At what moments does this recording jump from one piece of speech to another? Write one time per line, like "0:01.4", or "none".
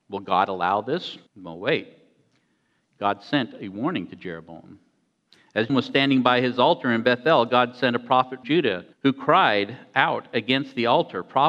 0:01.3
0:05.7
0:08.4
0:08.9

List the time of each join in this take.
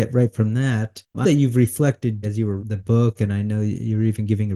0:01.2
0:02.2
0:02.6

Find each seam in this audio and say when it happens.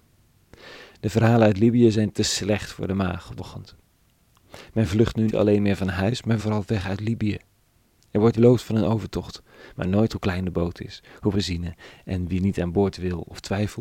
0:03.4
0:05.3
0:06.4
0:08.3
0:10.1
0:11.3

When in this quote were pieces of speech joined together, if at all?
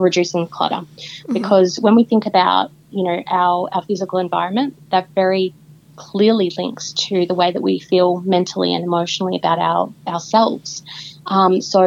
none

